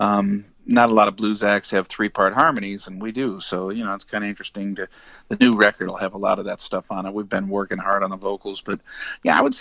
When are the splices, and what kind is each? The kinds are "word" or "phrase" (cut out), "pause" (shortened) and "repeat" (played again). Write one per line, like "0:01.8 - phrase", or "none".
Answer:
none